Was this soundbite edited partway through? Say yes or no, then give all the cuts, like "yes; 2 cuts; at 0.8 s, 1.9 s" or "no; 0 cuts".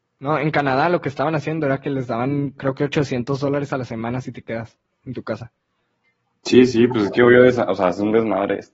no; 0 cuts